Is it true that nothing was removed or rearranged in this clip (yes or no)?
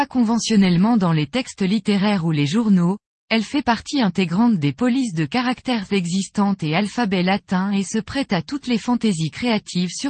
yes